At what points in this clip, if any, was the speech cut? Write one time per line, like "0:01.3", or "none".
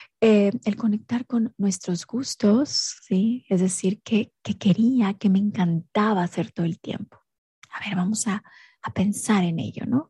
none